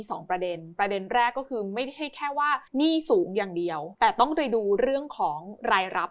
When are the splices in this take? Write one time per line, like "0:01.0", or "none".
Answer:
0:02.7
0:03.9